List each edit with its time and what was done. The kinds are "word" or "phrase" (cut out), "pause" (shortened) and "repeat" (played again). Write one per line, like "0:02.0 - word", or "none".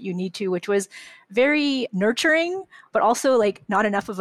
none